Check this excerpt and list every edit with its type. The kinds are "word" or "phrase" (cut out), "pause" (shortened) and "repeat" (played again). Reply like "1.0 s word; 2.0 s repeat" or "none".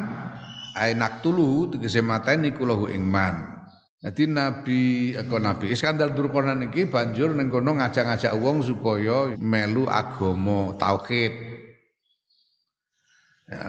3.8 s pause; 9.3 s word